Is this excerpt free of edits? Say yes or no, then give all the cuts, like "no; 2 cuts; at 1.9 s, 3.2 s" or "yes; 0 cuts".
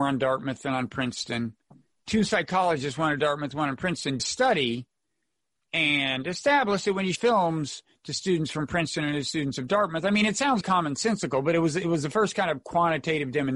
no; 4 cuts; at 1.7 s, 4.2 s, 7.2 s, 10.6 s